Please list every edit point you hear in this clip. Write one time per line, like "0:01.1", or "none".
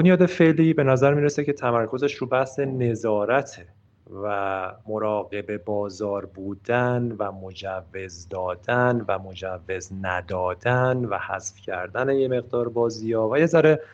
0:04.8